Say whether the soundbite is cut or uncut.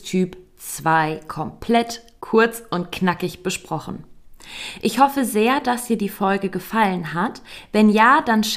uncut